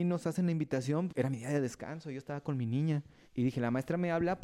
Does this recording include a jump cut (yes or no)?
yes